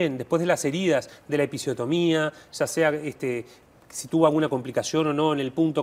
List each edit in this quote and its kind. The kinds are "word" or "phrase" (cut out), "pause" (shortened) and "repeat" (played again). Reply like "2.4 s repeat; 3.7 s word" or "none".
none